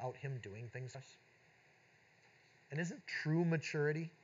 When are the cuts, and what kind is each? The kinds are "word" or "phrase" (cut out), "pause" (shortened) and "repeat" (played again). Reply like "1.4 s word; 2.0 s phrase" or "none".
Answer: 0.9 s word; 3.0 s word